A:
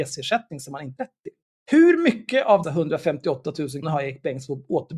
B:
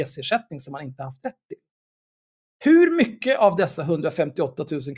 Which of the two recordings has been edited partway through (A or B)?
A